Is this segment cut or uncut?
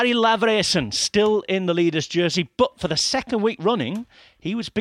uncut